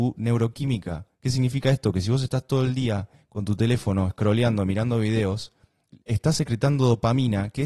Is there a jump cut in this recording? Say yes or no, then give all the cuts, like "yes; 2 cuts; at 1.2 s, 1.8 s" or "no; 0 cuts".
yes; 1 cut; at 1.1 s